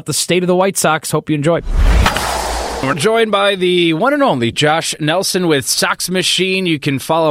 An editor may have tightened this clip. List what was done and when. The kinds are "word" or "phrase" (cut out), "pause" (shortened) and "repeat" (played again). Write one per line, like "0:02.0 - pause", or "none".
0:02.9 - word